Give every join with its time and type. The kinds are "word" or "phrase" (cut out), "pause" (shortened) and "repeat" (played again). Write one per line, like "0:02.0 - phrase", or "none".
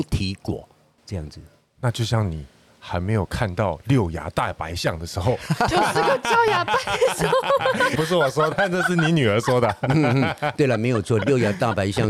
0:07.9 - word
0:08.5 - word